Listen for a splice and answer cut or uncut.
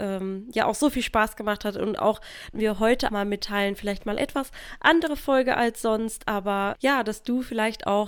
cut